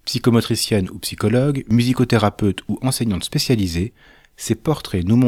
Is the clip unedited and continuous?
yes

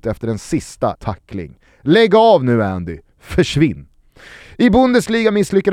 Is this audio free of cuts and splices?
no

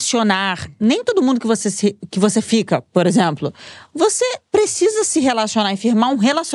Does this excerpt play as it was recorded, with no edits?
yes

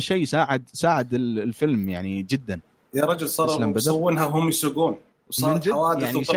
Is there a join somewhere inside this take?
no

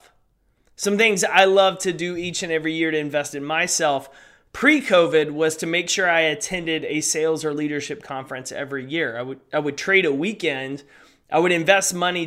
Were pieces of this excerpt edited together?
no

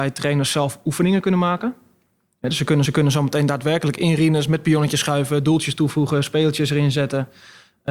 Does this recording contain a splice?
yes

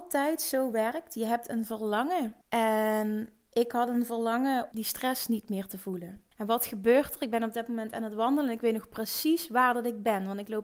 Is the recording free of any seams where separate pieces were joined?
no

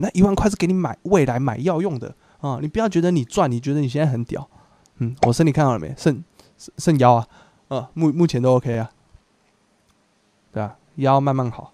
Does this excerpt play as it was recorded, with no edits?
yes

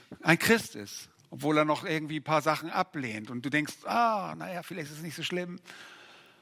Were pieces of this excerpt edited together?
no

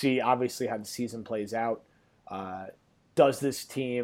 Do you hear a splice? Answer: no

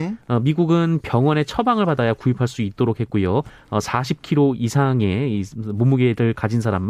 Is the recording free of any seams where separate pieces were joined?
yes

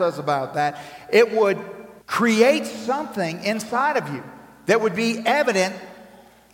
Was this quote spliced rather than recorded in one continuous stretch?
yes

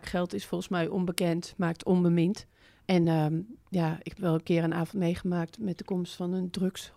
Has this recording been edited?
no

